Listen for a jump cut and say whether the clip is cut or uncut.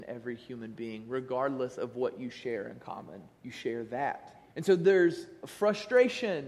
cut